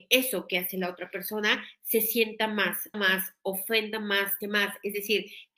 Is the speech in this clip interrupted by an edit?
yes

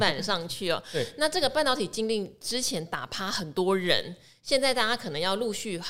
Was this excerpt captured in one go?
yes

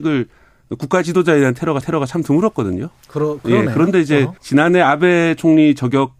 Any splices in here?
yes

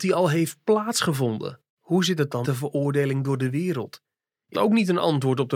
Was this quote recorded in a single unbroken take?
no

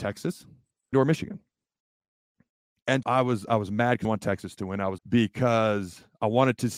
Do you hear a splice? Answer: yes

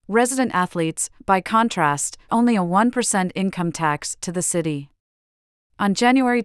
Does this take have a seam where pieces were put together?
yes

